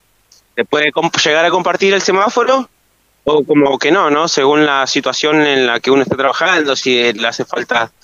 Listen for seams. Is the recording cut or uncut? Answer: uncut